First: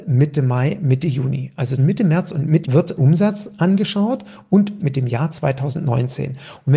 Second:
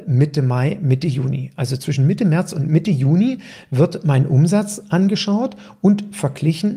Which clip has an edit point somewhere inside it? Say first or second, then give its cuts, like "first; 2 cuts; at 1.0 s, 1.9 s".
first; 4 cuts; at 1.8 s, 2.6 s, 3.0 s, 4.8 s